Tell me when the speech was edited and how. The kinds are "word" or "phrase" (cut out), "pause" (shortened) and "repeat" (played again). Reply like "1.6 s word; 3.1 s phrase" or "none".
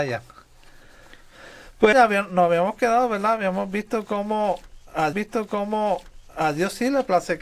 1.9 s word; 5.1 s repeat